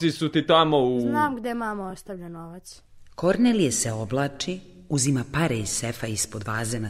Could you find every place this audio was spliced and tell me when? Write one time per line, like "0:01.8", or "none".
none